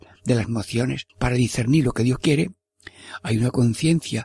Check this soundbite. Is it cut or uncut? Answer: cut